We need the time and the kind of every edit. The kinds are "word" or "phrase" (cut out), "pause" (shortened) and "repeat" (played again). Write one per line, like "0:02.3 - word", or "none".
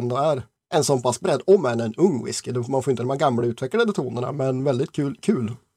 none